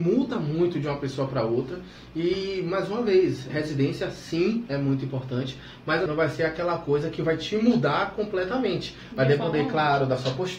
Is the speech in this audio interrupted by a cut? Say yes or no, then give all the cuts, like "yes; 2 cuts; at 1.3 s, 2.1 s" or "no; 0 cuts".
yes; 2 cuts; at 3.5 s, 6.1 s